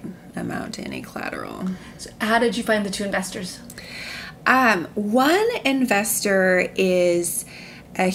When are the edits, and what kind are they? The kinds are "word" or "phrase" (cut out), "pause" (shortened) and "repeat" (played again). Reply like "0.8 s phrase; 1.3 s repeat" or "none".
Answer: none

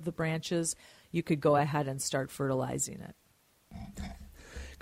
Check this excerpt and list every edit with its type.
none

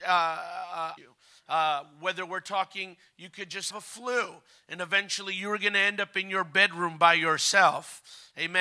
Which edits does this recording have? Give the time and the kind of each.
1.0 s word; 3.7 s word

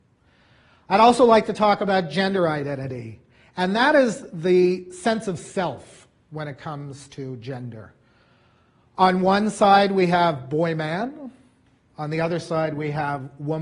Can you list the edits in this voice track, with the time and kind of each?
none

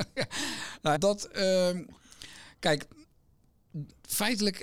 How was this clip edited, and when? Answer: 0.9 s word

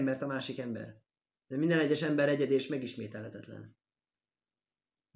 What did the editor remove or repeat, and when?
none

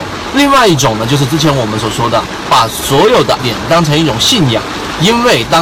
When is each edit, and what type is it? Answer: 3.4 s word

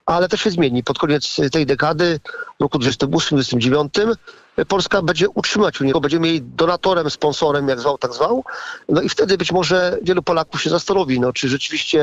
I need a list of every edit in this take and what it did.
5.9 s word

